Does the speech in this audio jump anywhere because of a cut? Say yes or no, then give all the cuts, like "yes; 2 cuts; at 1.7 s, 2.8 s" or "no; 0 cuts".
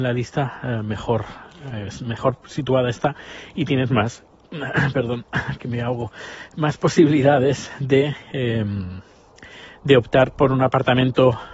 no; 0 cuts